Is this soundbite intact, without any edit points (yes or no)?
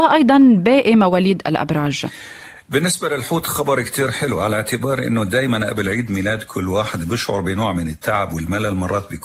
yes